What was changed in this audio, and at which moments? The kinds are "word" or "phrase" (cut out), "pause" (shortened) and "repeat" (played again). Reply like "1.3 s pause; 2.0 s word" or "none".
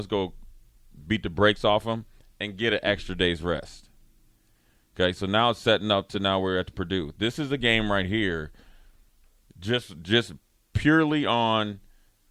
none

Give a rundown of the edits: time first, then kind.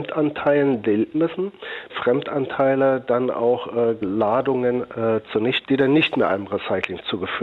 1.1 s word; 1.9 s word; 4.0 s word; 5.6 s word

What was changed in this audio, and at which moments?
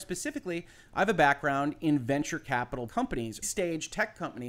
2.9 s word; 3.4 s word

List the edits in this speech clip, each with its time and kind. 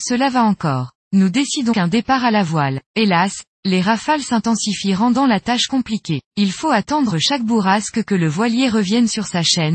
1.0 s pause; 1.7 s word; 2.8 s pause; 6.3 s pause; 7.1 s word

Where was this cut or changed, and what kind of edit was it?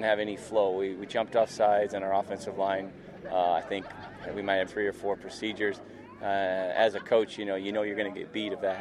4.7 s word

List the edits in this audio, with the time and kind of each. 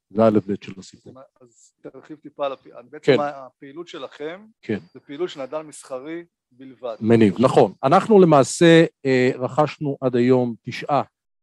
1.8 s word; 4.5 s pause

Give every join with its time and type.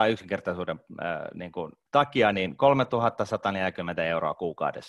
1.9 s pause

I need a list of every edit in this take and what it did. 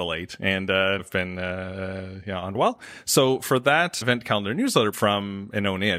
1.0 s word; 2.5 s phrase; 4.0 s word; 4.9 s phrase

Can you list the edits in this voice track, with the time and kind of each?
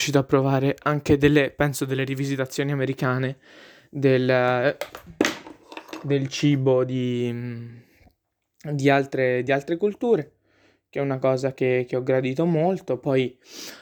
none

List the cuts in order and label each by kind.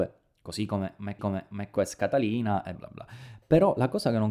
1.2 s repeat; 2.7 s word

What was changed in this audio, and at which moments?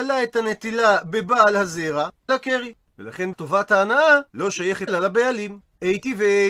2.3 s phrase; 3.3 s word; 4.3 s pause; 4.9 s word

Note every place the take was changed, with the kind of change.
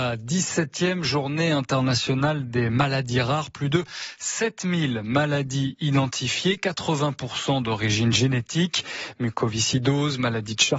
none

